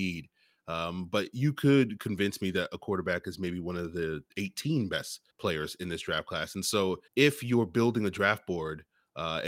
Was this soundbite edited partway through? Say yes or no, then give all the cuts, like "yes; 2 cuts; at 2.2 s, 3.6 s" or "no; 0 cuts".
yes; 3 cuts; at 4.3 s, 5.3 s, 7.1 s